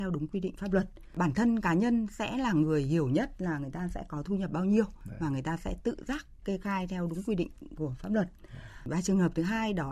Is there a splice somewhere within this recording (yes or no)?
no